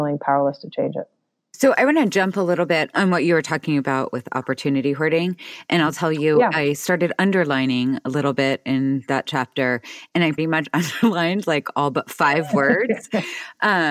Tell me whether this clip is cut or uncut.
cut